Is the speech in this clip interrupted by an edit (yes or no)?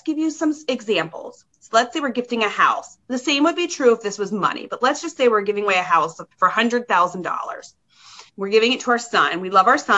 yes